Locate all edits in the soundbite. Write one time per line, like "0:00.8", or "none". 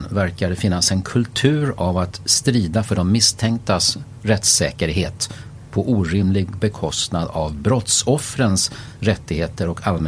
none